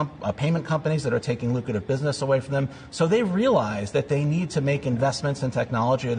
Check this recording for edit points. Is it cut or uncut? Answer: uncut